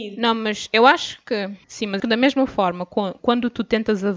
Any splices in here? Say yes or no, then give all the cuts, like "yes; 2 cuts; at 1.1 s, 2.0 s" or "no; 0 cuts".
yes; 3 cuts; at 1.6 s, 2.0 s, 3.2 s